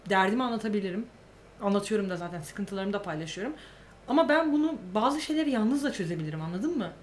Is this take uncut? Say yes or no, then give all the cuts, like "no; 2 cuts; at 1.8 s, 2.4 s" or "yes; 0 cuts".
yes; 0 cuts